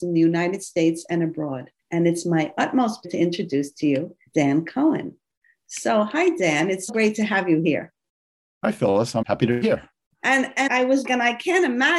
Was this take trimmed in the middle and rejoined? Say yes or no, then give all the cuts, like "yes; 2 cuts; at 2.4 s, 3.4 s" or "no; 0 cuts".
yes; 8 cuts; at 1.8 s, 3.0 s, 4.3 s, 6.9 s, 9.2 s, 9.6 s, 10.7 s, 11.0 s